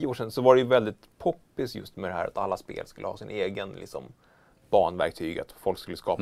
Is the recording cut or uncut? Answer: uncut